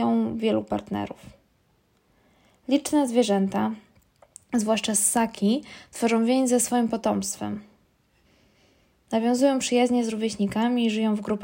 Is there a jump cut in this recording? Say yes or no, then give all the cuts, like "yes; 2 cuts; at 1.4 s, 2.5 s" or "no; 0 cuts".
no; 0 cuts